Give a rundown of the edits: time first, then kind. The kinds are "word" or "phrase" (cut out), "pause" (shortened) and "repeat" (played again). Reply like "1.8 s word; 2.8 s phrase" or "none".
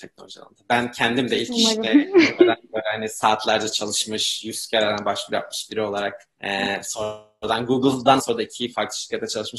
6.3 s pause; 8.2 s phrase